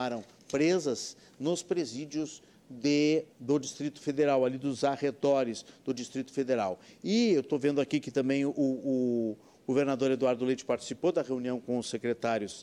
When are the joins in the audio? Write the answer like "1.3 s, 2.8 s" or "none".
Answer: 3.3 s